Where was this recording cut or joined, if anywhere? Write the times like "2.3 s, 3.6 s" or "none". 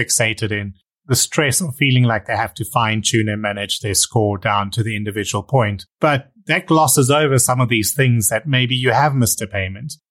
5.9 s